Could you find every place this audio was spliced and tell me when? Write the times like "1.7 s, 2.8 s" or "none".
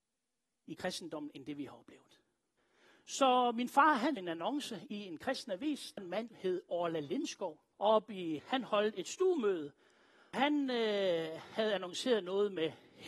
2.6 s, 4.2 s, 6.0 s, 6.3 s, 7.7 s, 8.4 s, 10.3 s